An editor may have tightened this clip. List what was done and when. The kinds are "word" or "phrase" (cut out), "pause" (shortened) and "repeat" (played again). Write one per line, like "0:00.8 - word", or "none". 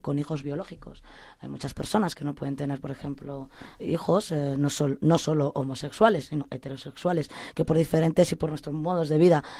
0:03.8 - word